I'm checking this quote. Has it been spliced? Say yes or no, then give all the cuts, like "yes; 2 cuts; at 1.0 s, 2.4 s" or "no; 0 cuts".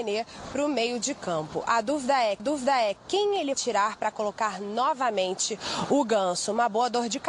yes; 2 cuts; at 2.4 s, 3.5 s